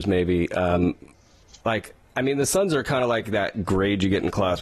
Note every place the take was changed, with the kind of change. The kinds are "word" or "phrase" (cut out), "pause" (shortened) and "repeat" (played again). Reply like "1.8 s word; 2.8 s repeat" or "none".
none

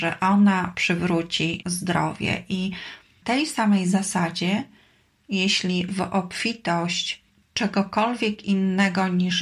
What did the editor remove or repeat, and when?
1.6 s word; 3.2 s word; 5.9 s word; 7.3 s pause

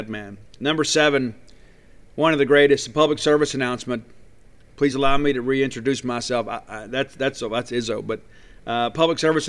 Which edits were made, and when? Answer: none

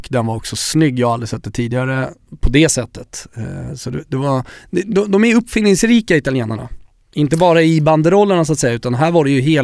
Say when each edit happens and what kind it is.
6.8 s pause

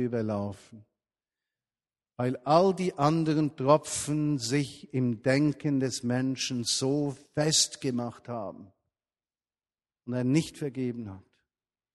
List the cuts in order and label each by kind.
7.3 s pause

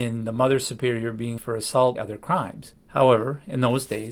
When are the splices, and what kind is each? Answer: 1.4 s word; 2.0 s phrase

